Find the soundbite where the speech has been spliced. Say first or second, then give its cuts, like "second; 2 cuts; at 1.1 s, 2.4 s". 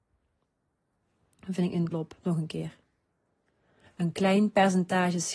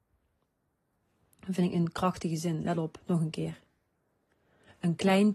first; 1 cut; at 1.9 s